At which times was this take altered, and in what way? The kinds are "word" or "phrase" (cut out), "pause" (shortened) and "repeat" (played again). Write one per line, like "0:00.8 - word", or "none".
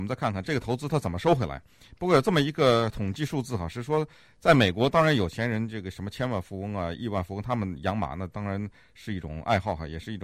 none